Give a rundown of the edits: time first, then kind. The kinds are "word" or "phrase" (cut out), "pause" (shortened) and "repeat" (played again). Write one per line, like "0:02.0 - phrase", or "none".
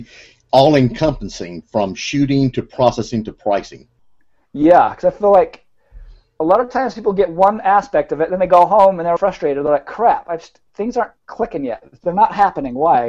0:09.2 - word